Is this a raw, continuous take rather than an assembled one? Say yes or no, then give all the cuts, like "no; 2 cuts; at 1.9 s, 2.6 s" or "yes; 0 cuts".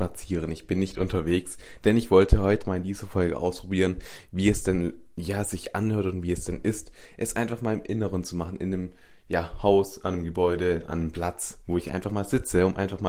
no; 1 cut; at 2.6 s